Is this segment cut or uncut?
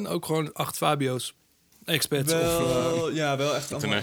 uncut